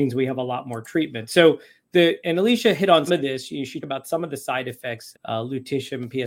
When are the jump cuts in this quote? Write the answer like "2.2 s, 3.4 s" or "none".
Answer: 2.2 s, 3.1 s, 3.8 s, 5.1 s